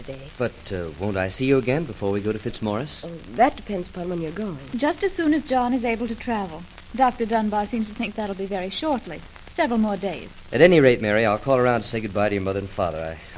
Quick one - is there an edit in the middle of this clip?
no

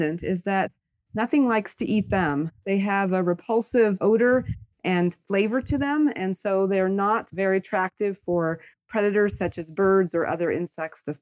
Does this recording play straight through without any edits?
yes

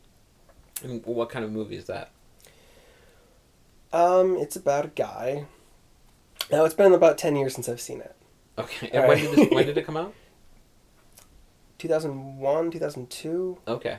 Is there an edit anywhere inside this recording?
no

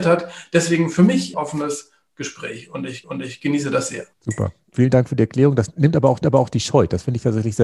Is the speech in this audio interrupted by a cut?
yes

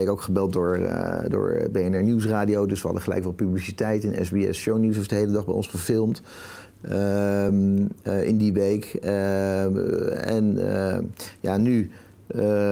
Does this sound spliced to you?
no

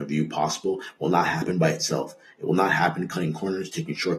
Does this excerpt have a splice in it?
no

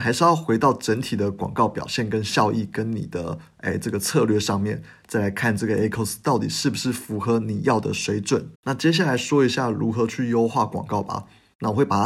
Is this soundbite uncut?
no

